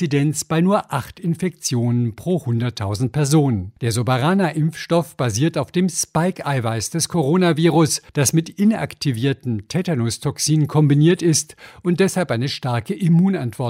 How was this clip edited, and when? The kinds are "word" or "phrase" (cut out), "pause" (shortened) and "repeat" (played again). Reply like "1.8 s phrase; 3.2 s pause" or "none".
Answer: 3.8 s pause; 8.1 s pause